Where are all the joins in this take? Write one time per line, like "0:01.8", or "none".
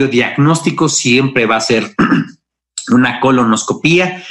none